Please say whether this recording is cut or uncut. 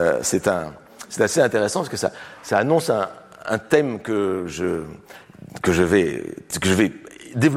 uncut